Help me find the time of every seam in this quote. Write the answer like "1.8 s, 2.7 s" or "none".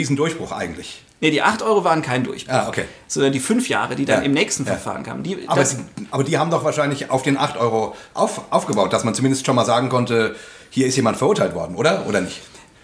none